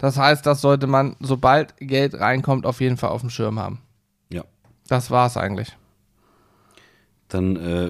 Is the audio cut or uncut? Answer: uncut